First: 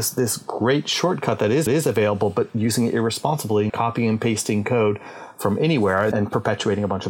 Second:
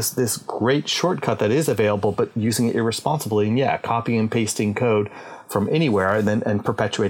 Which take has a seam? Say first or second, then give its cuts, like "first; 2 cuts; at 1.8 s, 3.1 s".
first; 3 cuts; at 1.7 s, 3.7 s, 6.1 s